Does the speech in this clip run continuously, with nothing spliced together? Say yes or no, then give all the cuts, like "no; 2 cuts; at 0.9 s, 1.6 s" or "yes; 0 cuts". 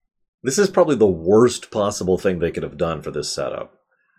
yes; 0 cuts